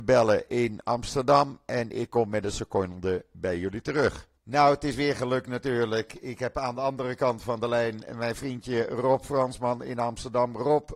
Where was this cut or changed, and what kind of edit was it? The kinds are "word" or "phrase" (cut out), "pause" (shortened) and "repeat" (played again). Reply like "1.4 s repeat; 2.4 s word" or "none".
4.4 s pause